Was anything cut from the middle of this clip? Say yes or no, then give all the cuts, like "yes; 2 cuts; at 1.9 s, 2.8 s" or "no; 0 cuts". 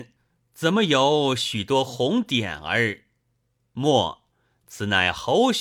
no; 0 cuts